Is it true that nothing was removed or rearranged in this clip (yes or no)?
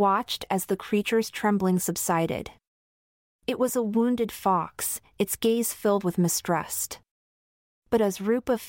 yes